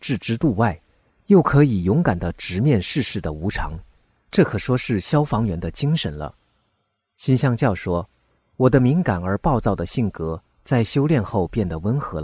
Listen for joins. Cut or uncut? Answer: uncut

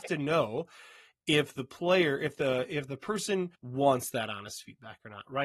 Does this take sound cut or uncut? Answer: cut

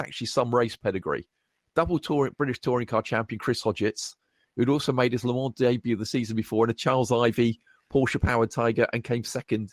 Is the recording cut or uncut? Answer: uncut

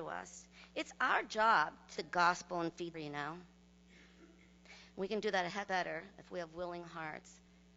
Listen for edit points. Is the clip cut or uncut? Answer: cut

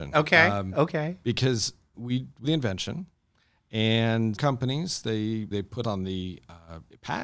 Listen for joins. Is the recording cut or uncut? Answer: cut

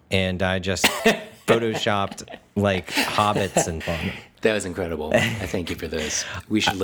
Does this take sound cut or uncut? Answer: cut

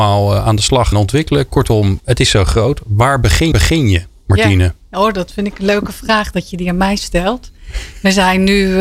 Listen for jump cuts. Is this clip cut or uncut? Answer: cut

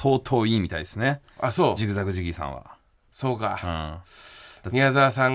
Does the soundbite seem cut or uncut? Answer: uncut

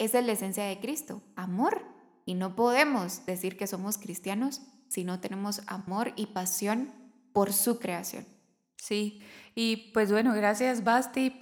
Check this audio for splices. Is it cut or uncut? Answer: uncut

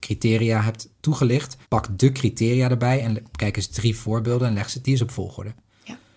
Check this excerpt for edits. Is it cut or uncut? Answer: cut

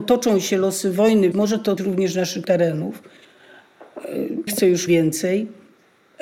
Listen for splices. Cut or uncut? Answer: cut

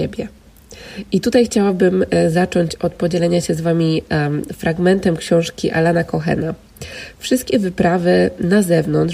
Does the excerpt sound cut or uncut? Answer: uncut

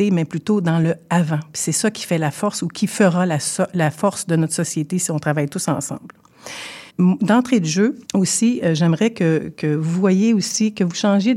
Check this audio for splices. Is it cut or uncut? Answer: cut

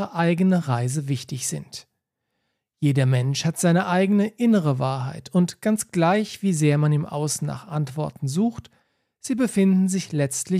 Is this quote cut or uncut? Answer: uncut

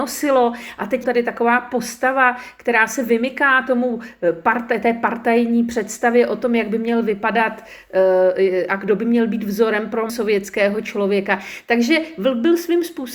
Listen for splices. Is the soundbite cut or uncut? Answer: cut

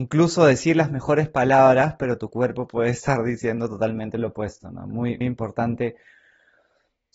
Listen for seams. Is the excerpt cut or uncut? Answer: cut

